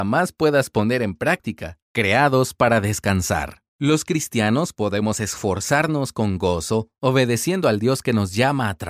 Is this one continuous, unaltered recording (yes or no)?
no